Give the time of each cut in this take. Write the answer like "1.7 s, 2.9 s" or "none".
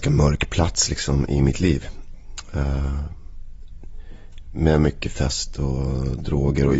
none